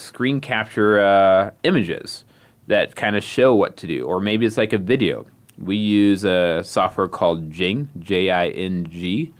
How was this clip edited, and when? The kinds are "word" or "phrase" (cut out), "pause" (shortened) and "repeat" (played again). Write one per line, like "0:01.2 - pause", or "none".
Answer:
none